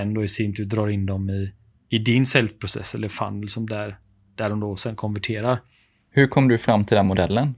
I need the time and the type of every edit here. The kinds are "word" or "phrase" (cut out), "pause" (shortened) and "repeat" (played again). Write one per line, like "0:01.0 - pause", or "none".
none